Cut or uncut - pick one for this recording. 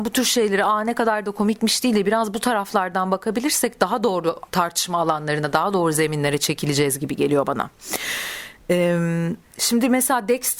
cut